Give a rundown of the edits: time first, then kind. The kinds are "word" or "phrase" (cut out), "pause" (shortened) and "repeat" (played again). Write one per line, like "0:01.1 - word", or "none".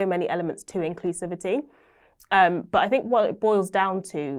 none